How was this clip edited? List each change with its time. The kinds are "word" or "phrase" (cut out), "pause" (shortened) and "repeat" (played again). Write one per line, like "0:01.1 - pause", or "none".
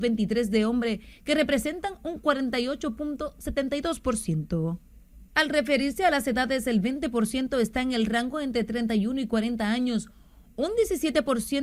0:05.3 - pause